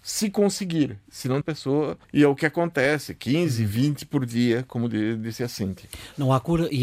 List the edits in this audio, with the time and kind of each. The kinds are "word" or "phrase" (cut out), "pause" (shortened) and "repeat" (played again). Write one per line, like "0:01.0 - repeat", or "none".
0:01.4 - phrase
0:02.0 - pause